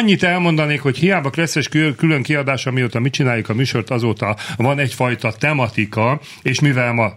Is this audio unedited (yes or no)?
yes